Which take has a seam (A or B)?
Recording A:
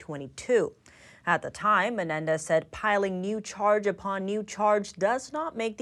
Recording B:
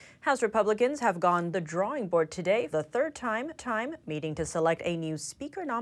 B